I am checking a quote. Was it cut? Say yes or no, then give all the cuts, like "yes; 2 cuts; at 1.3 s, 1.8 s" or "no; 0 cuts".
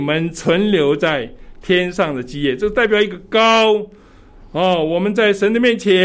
no; 0 cuts